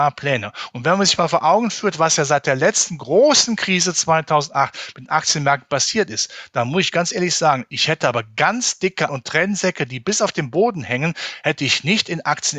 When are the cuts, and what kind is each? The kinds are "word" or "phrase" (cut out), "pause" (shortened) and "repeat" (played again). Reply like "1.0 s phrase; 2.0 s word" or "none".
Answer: 9.1 s word